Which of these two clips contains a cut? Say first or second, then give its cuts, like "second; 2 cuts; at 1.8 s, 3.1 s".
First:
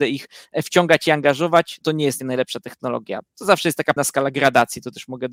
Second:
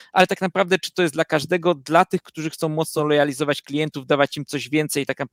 first; 3 cuts; at 1.8 s, 2.2 s, 4.0 s